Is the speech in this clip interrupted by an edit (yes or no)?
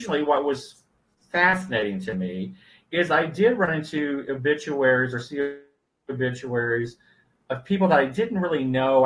no